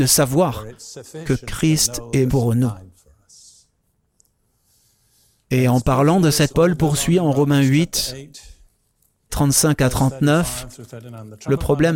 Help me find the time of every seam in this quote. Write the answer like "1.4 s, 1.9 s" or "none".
2.3 s, 6.5 s, 9.3 s